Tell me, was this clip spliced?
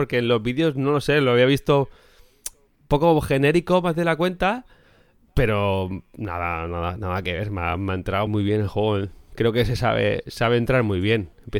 yes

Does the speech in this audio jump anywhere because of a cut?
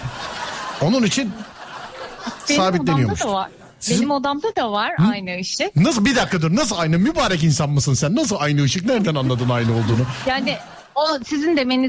no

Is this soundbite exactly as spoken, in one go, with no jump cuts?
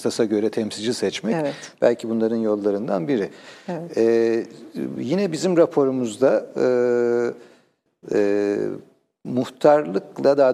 yes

